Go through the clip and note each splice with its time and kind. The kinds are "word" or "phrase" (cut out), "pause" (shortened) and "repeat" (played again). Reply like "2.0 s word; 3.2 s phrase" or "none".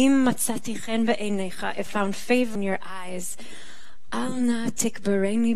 1.9 s word; 2.6 s word